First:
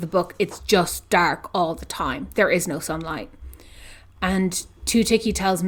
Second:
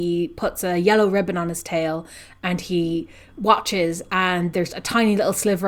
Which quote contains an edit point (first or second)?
second